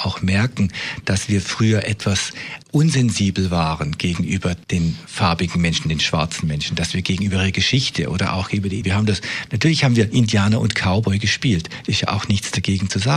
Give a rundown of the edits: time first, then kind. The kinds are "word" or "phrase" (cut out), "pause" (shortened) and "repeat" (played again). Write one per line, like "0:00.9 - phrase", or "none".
0:02.6 - pause
0:04.6 - pause
0:08.8 - word